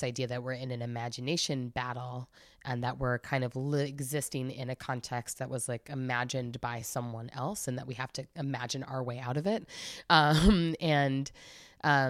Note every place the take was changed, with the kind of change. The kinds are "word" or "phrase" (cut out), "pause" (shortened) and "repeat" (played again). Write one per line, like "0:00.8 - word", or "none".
none

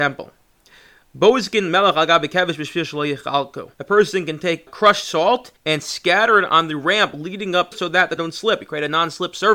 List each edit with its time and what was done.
0:03.7 - pause
0:04.7 - word
0:05.6 - pause
0:07.7 - phrase
0:08.2 - word

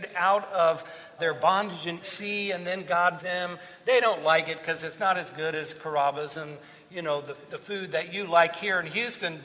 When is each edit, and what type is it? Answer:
0:01.2 - word
0:02.0 - phrase
0:03.2 - word

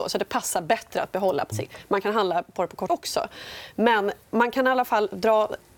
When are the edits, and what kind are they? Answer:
0:01.5 - word
0:02.9 - word
0:04.2 - pause

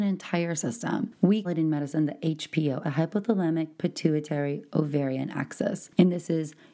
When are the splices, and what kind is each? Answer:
0:01.4 - word
0:02.8 - phrase

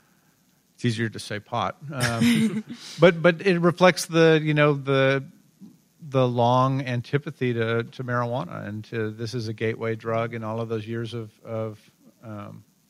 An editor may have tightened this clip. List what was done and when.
none

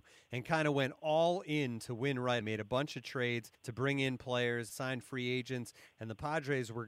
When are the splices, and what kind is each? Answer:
0:02.4 - word
0:03.5 - pause
0:04.7 - word

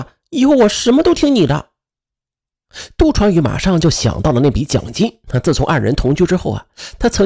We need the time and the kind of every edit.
0:05.2 - pause

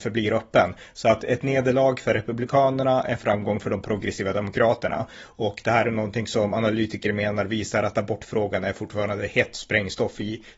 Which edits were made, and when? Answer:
none

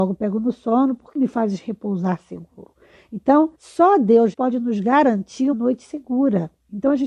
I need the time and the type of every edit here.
0:01.2 - phrase
0:03.5 - pause
0:04.3 - word
0:05.5 - word

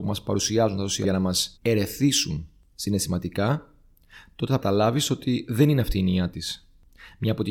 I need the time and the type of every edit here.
0:01.0 - word
0:01.6 - pause
0:04.6 - phrase

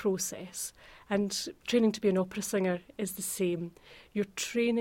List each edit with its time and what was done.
0:01.6 - pause

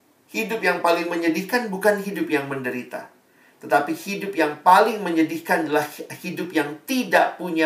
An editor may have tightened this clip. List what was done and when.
none

